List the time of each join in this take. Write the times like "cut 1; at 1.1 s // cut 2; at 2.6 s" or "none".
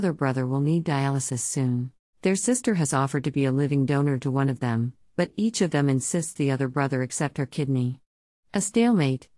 cut 1; at 2.0 s